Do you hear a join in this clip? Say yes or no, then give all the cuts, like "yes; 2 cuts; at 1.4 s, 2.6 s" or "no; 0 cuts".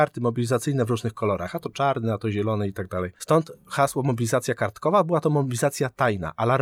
no; 0 cuts